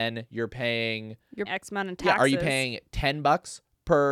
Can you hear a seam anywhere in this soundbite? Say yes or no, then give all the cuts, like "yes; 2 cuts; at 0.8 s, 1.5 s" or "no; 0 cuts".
yes; 1 cut; at 1.5 s